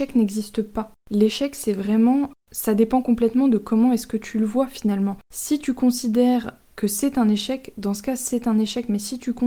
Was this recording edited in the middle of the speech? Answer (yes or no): no